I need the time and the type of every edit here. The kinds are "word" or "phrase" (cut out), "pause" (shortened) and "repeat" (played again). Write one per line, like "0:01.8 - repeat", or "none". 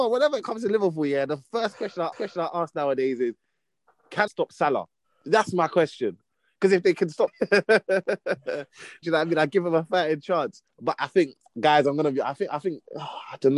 0:02.1 - repeat
0:04.3 - phrase
0:05.0 - pause
0:07.3 - word
0:09.0 - word
0:10.7 - pause